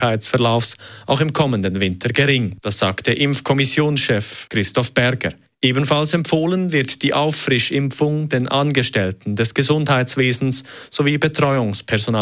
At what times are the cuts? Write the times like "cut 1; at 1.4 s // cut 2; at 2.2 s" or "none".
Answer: none